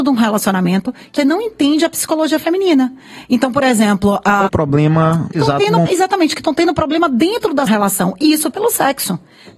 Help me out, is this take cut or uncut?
cut